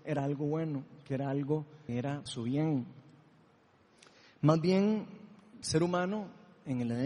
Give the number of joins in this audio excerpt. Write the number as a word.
three